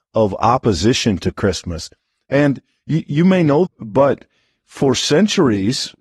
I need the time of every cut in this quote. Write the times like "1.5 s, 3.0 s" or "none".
3.7 s